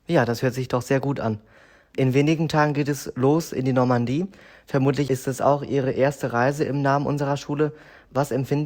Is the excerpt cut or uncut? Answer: uncut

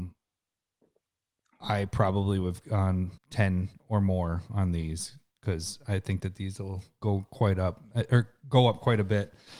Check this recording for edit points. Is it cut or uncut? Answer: cut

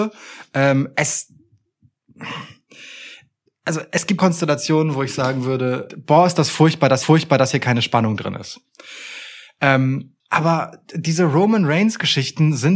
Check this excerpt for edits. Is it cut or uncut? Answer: cut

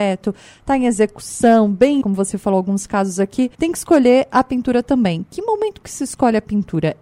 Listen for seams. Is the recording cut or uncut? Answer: cut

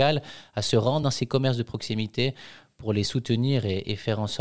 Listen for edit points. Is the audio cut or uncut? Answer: uncut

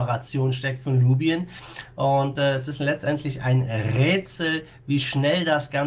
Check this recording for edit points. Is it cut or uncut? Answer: uncut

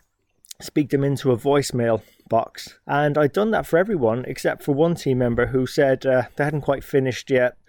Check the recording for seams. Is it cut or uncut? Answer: cut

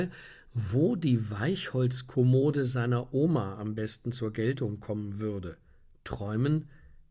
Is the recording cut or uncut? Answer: uncut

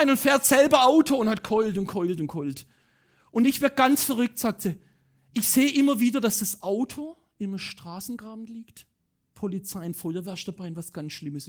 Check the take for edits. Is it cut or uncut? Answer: uncut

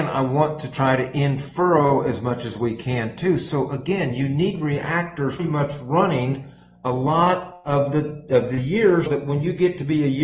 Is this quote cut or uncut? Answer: cut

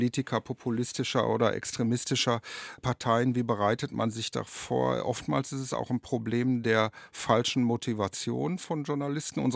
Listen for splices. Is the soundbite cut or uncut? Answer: uncut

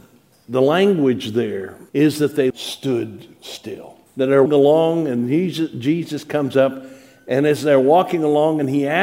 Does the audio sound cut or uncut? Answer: cut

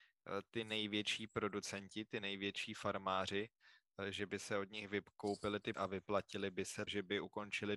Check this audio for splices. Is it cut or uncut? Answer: cut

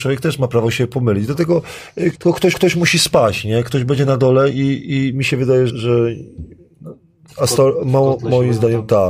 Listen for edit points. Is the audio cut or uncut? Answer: cut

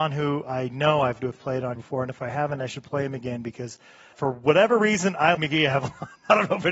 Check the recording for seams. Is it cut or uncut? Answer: cut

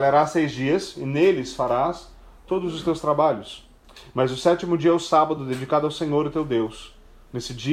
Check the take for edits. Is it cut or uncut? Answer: uncut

